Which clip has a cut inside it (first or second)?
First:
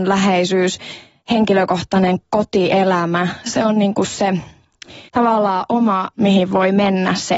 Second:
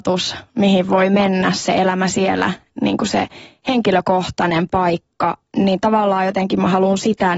first